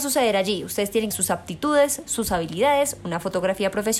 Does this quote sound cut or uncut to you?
cut